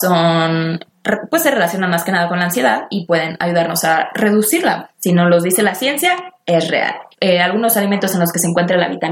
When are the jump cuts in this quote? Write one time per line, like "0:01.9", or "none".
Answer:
0:04.9
0:07.1